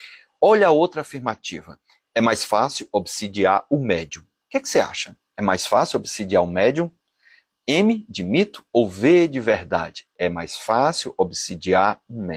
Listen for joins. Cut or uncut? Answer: uncut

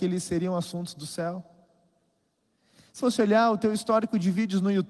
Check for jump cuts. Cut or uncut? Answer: cut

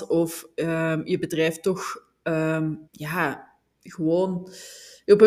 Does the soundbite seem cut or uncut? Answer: cut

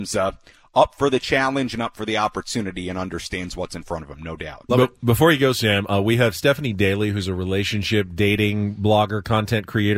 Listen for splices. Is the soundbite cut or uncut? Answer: uncut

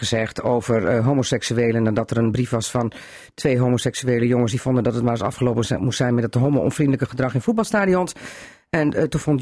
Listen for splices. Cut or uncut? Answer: uncut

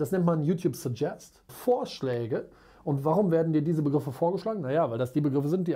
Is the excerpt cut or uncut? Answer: cut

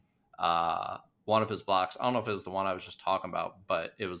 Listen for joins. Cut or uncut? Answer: uncut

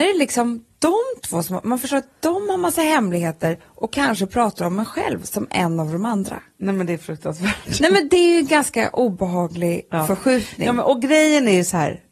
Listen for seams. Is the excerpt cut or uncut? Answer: uncut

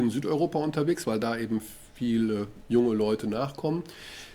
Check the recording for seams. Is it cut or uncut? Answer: uncut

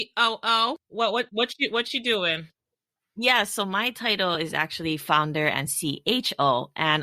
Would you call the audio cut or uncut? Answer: uncut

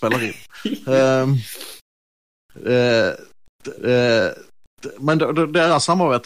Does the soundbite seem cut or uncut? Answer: cut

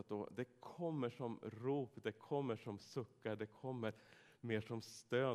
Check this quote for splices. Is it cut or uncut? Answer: uncut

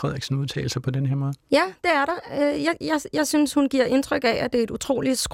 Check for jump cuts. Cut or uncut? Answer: uncut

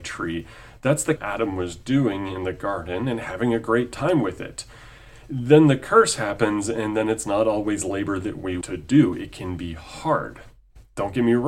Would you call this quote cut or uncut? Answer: cut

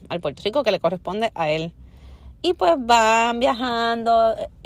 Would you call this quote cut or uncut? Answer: uncut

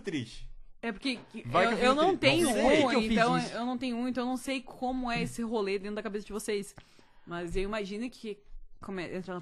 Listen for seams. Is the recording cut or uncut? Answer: uncut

